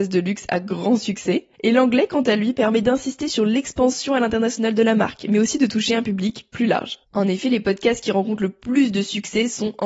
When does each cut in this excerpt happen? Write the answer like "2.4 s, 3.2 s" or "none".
1.5 s, 7.0 s